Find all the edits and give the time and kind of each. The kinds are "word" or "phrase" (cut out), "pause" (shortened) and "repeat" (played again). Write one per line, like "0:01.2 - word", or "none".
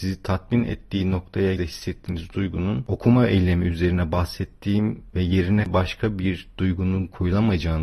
0:01.6 - word